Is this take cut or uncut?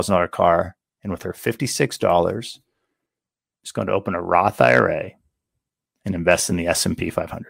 uncut